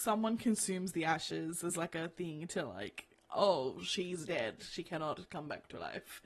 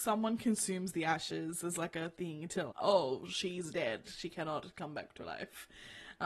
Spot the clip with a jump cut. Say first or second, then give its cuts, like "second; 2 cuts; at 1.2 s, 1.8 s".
second; 1 cut; at 2.7 s